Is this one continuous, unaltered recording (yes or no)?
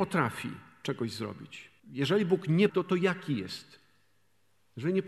no